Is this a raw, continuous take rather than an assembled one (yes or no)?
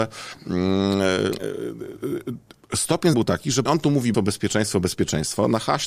no